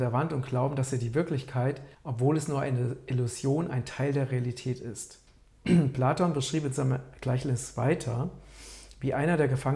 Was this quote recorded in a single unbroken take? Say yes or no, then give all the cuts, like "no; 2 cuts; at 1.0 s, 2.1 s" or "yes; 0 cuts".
no; 2 cuts; at 1.9 s, 5.3 s